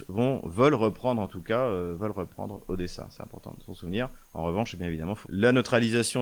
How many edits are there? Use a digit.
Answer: 1